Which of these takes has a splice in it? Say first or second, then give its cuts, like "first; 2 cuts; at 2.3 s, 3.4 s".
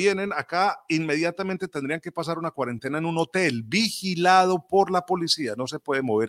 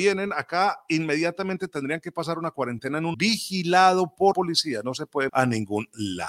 second; 3 cuts; at 3.1 s, 4.3 s, 5.3 s